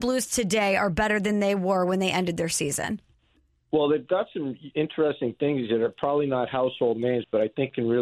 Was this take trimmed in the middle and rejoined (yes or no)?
no